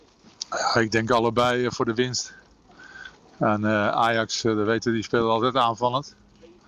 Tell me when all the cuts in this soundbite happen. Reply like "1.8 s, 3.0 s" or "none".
none